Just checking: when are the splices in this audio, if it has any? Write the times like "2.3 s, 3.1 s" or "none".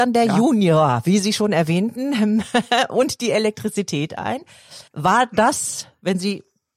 4.9 s